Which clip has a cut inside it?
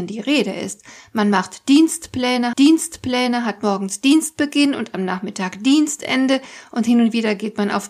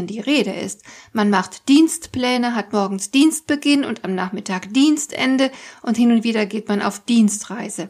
first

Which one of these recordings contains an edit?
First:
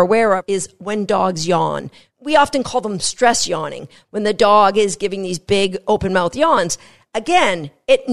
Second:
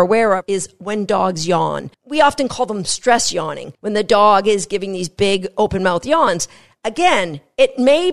second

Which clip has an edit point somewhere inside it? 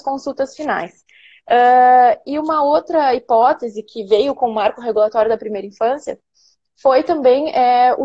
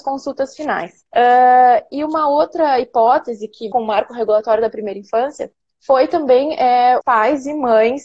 second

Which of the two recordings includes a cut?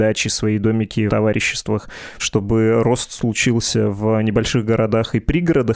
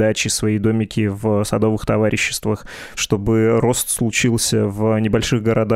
first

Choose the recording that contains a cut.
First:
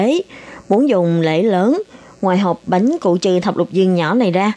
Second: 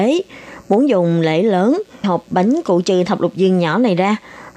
second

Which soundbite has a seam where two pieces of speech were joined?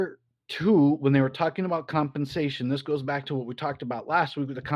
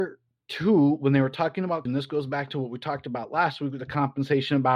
second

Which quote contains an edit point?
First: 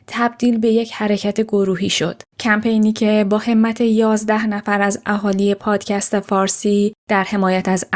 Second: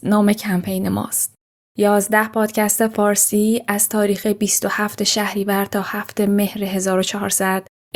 first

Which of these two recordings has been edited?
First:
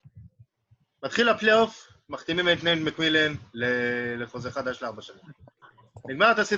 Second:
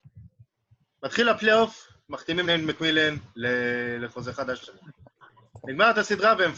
second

